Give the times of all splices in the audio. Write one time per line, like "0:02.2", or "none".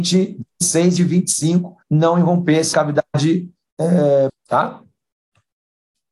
0:01.0
0:01.8
0:02.7
0:04.3